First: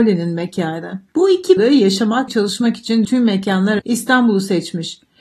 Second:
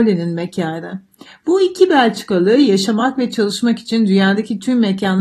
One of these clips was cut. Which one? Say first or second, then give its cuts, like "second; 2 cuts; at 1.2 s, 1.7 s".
first; 5 cuts; at 1.1 s, 1.6 s, 2.3 s, 3.0 s, 3.8 s